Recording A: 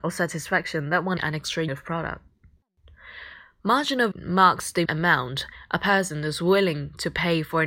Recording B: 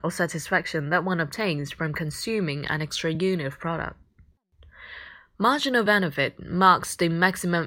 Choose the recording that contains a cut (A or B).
A